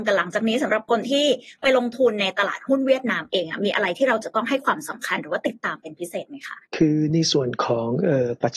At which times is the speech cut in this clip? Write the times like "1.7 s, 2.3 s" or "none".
6.7 s